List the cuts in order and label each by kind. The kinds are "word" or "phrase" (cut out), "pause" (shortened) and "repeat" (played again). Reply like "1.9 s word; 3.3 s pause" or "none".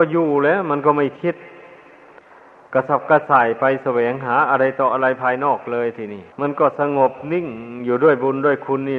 6.3 s pause